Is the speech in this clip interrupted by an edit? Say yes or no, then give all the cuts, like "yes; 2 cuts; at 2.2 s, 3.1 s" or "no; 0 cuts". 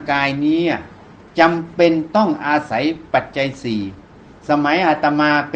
no; 0 cuts